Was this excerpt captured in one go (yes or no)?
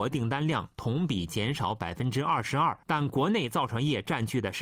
no